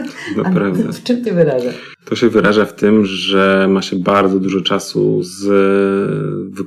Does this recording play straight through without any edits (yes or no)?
no